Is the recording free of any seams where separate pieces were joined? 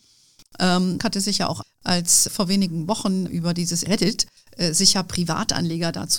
no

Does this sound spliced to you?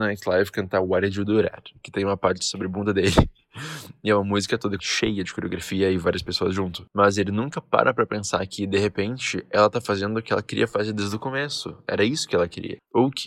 yes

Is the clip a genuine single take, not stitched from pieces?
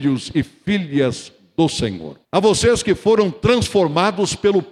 no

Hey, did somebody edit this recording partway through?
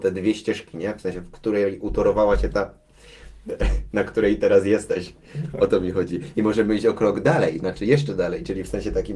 no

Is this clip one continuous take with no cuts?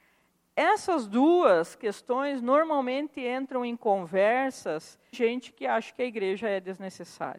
no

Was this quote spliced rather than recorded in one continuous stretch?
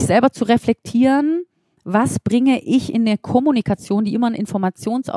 no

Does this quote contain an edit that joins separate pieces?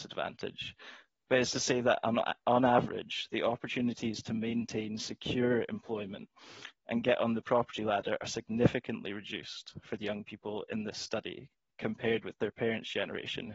no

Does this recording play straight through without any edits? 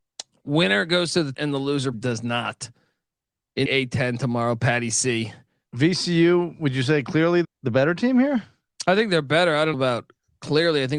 no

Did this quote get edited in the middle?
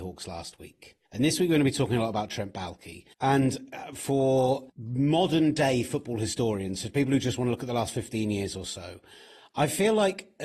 yes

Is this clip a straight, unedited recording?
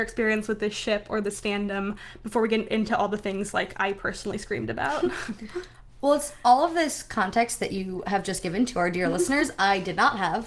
yes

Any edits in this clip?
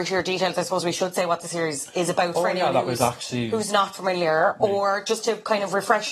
no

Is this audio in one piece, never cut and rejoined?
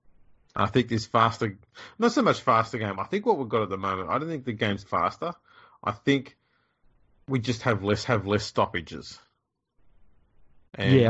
no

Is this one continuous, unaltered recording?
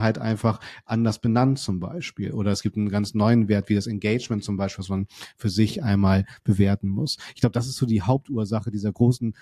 yes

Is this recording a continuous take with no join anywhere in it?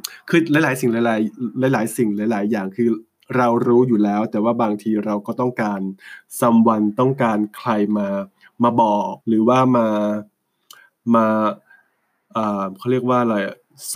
no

